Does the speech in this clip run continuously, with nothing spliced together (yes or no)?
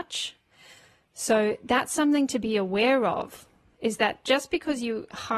yes